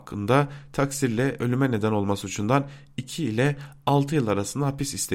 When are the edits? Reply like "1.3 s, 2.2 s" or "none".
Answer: none